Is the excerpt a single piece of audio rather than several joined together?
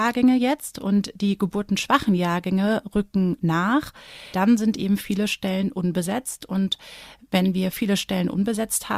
yes; 0 cuts

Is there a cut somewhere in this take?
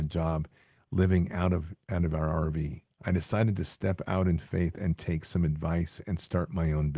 no; 0 cuts

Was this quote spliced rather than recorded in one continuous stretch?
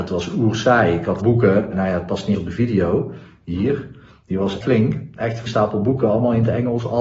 yes; 5 cuts; at 1.2 s, 1.7 s, 2.3 s, 4.6 s, 5.5 s

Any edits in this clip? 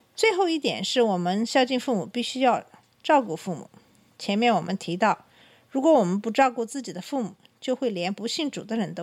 no; 0 cuts

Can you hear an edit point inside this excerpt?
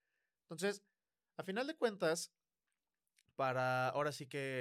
no; 0 cuts

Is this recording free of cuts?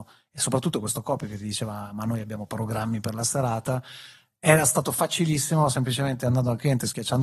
yes; 0 cuts

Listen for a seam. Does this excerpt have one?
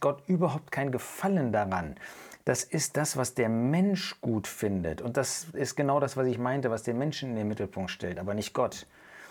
no; 0 cuts

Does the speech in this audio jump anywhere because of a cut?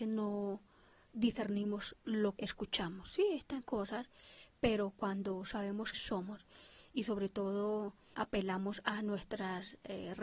yes; 4 cuts; at 2.4 s, 3.6 s, 5.9 s, 8.1 s

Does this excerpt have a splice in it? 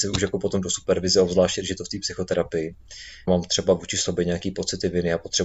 yes; 1 cut; at 3.3 s

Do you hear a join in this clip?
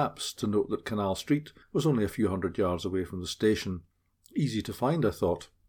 yes; 1 cut; at 1.6 s

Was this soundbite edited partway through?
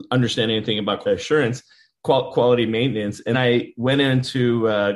yes; 2 cuts; at 1.0 s, 3.3 s

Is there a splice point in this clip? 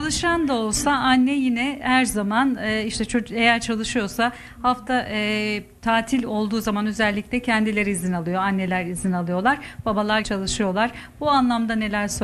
yes; 1 cut; at 10.2 s

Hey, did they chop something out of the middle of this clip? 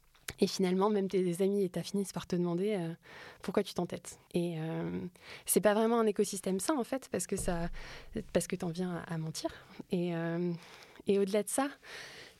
yes; 2 cuts; at 1.8 s, 4.3 s

